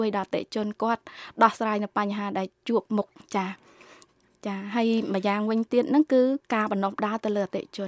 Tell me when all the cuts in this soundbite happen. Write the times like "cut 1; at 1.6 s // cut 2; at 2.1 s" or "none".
none